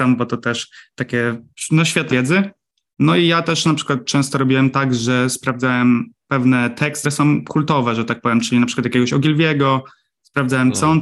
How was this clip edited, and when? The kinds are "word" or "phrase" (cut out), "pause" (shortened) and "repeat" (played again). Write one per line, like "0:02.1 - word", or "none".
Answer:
0:02.1 - word
0:07.0 - word